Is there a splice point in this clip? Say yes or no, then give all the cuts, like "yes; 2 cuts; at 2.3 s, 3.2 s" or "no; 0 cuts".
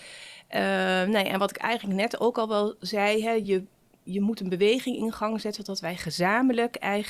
no; 0 cuts